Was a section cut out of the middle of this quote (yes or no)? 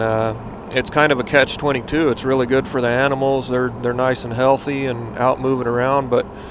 no